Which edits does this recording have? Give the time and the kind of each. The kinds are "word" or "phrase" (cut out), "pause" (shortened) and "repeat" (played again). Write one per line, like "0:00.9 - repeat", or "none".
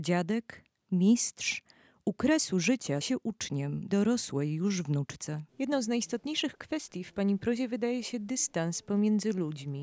0:03.0 - word
0:03.9 - phrase
0:05.5 - pause

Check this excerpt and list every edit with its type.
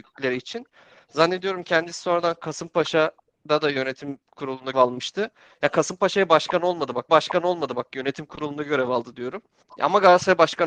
0:04.7 - word
0:07.1 - repeat
0:09.6 - pause

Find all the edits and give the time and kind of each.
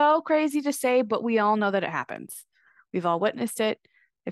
none

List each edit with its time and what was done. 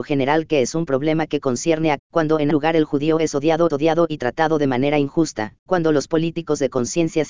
0:02.0 - phrase
0:02.5 - word
0:03.7 - repeat
0:05.7 - word

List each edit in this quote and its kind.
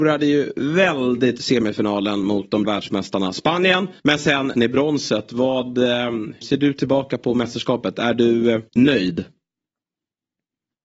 0:01.4 - word
0:02.6 - word
0:04.0 - pause
0:04.5 - word
0:06.4 - word
0:08.7 - pause

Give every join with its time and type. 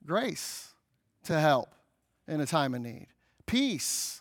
none

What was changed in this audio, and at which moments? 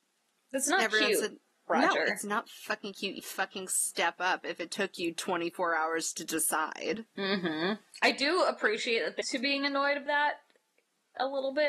0:03.2 - word
0:09.2 - word
0:10.1 - word

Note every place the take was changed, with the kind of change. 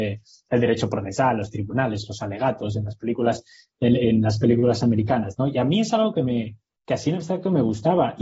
none

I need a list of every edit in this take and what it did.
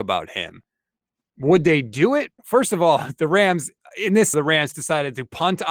0:02.4 - pause
0:04.3 - word
0:04.7 - phrase

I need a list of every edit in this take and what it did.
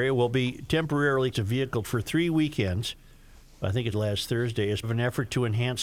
0:01.3 - word
0:01.8 - word
0:03.9 - word
0:04.8 - word

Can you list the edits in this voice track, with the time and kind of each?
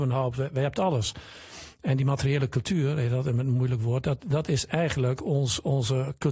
none

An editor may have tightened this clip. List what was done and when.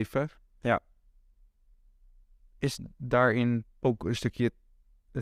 0:03.7 - pause

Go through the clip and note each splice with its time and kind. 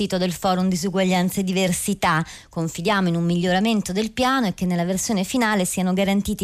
none

